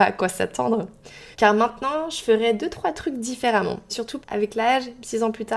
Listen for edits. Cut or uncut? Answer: cut